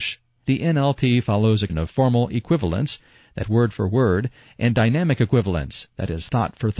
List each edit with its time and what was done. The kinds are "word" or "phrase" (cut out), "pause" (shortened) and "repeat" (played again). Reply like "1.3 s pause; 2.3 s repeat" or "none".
1.7 s word; 3.4 s word